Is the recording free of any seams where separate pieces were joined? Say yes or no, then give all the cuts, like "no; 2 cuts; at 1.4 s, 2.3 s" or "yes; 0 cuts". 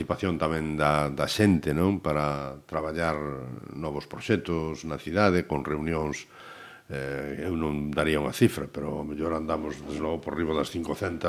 yes; 0 cuts